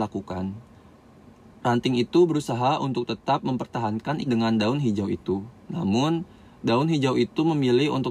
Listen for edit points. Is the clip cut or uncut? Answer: cut